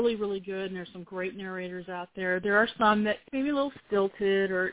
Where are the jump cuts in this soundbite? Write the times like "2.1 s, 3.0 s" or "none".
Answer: 3.3 s